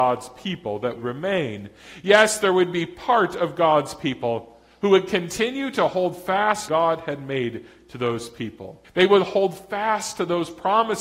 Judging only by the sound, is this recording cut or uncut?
cut